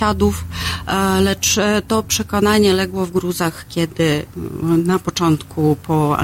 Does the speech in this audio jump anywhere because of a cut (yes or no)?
no